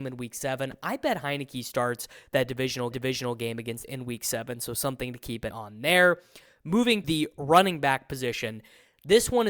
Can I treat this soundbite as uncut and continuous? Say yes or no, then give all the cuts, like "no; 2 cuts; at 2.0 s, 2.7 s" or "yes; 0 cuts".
no; 4 cuts; at 2.9 s, 3.8 s, 5.5 s, 7.0 s